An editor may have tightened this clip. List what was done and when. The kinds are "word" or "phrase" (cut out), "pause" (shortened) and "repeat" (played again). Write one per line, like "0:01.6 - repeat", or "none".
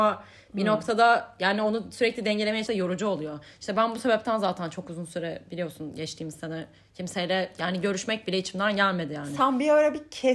0:02.7 - word